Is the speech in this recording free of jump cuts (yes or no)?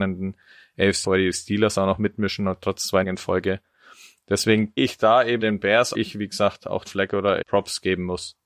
no